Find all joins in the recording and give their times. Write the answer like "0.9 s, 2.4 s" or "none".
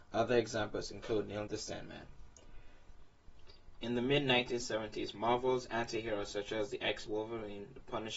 1.5 s, 7.1 s